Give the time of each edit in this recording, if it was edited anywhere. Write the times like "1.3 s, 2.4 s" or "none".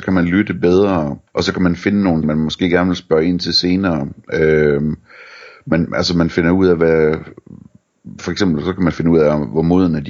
1.3 s, 2.2 s